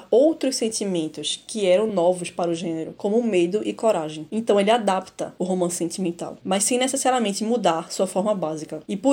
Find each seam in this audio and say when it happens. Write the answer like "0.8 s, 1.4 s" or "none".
none